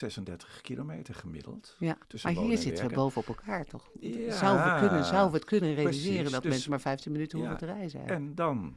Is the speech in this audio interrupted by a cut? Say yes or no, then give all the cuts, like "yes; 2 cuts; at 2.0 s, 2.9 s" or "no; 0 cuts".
yes; 1 cut; at 2.0 s